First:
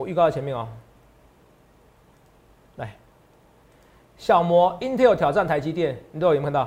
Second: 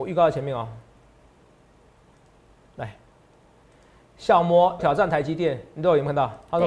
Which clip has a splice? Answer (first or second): second